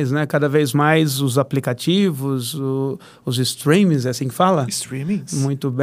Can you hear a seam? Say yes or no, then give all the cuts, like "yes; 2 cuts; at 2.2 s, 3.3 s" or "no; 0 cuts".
no; 0 cuts